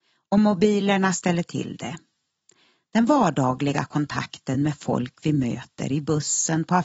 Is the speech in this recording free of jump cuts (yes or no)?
yes